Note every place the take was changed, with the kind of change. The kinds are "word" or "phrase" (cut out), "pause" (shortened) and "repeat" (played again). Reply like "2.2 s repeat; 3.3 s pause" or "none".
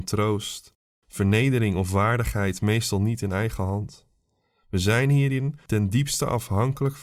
none